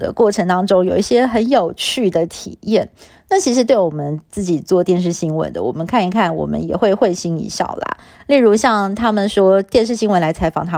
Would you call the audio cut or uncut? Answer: uncut